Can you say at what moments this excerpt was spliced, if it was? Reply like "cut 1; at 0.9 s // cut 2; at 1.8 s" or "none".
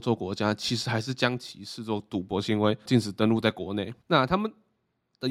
cut 1; at 2.9 s // cut 2; at 4.0 s